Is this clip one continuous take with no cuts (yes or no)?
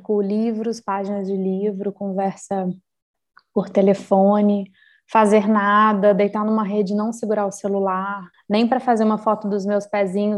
no